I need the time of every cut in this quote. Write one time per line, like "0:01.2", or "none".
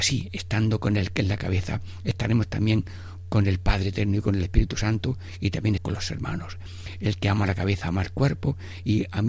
0:05.8